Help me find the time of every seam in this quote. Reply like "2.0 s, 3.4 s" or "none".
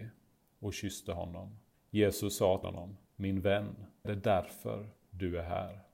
1.7 s, 2.6 s, 3.0 s, 4.0 s